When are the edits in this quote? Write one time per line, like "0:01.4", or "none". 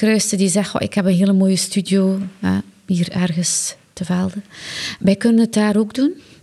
none